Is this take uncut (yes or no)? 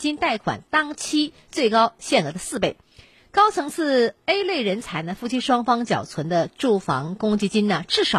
yes